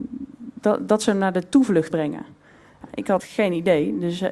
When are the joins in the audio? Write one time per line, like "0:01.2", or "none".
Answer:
0:01.9
0:03.2